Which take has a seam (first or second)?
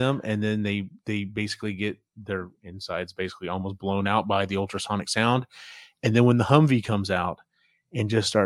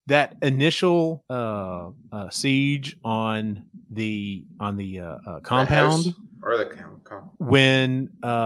second